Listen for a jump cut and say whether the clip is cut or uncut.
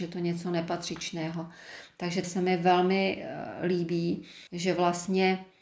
cut